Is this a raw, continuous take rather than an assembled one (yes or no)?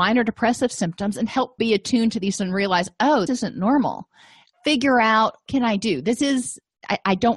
no